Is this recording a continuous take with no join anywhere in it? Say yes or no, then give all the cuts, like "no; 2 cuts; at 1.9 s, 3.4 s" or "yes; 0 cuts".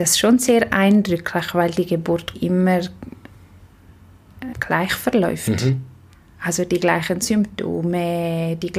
no; 2 cuts; at 2.3 s, 4.5 s